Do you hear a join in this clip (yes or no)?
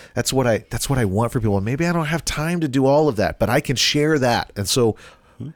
no